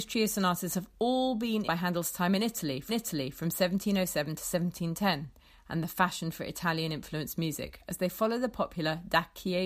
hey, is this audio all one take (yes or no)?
no